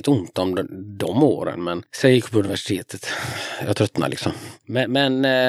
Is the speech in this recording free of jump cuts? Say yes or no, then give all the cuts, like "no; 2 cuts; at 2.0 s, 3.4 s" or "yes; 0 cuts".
yes; 0 cuts